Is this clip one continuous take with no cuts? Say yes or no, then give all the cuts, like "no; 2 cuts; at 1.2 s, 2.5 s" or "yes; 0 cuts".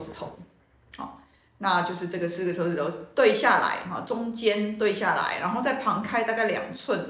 yes; 0 cuts